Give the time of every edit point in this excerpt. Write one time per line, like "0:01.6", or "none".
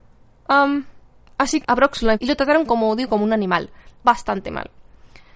0:01.6
0:02.1
0:04.0